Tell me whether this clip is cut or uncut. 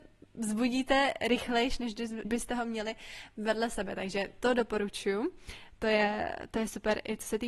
cut